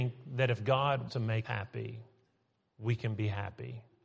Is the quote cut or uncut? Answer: cut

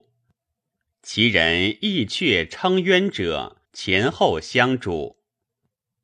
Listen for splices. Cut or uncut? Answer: cut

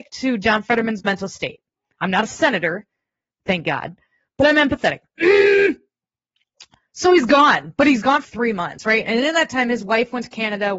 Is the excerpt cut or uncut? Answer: cut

